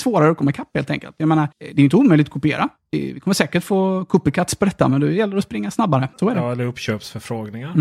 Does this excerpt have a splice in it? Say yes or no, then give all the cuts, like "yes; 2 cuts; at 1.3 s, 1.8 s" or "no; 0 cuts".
yes; 2 cuts; at 1.5 s, 6.1 s